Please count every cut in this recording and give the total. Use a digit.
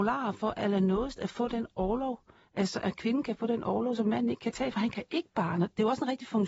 0